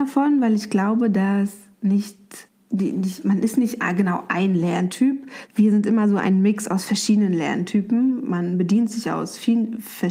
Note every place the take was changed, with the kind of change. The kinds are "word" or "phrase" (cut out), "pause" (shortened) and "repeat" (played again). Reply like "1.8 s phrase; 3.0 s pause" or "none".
2.5 s pause; 5.5 s word